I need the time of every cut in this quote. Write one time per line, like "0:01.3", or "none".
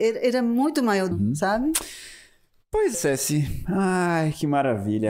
0:01.1
0:02.9